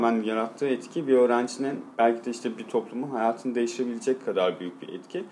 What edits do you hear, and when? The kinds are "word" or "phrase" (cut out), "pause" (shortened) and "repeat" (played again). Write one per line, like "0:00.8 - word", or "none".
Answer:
0:01.9 - pause